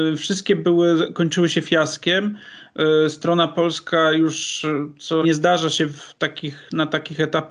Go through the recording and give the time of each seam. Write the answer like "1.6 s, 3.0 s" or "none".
5.2 s